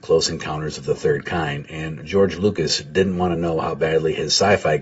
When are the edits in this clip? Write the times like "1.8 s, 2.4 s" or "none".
none